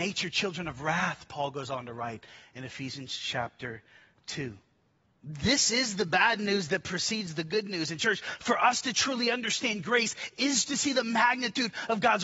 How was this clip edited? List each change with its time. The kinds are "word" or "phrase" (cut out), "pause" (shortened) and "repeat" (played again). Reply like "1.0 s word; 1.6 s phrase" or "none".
none